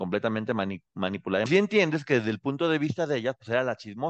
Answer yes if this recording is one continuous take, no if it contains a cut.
no